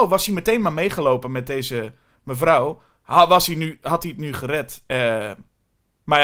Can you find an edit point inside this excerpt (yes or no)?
no